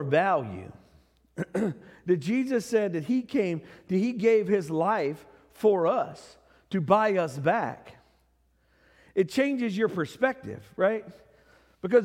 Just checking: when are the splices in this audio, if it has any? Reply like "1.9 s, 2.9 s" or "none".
none